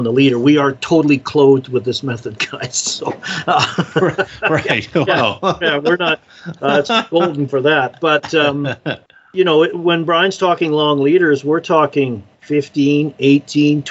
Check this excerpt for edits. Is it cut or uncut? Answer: cut